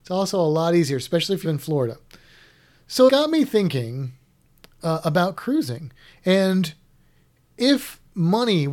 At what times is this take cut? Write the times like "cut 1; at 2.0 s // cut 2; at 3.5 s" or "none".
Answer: cut 1; at 1.4 s // cut 2; at 3.1 s

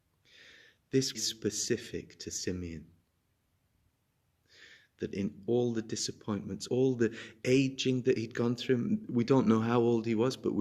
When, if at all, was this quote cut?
cut 1; at 1.1 s // cut 2; at 6.7 s

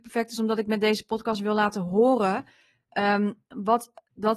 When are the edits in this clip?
none

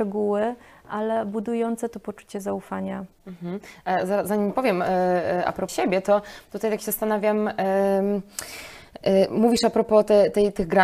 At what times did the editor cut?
cut 1; at 5.7 s

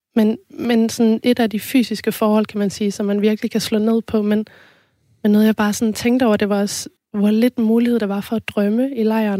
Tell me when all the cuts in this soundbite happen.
cut 1; at 7.0 s

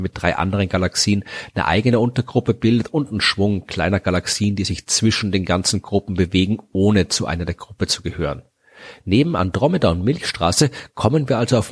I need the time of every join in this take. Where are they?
none

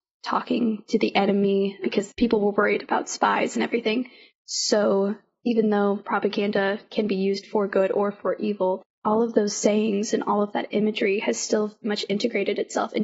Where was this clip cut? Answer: cut 1; at 11.8 s

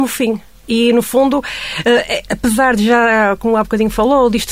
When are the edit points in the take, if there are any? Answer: none

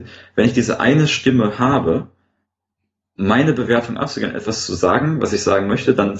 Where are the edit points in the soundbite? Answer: none

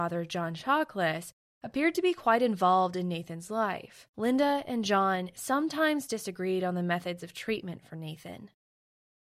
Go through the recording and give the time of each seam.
cut 1; at 4.1 s

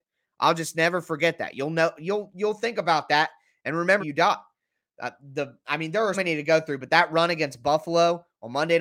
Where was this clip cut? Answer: cut 1; at 4.0 s // cut 2; at 6.1 s

